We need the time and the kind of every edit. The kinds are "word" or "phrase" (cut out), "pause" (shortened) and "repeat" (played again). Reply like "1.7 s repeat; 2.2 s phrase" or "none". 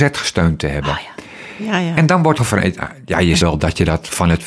2.4 s word; 3.4 s word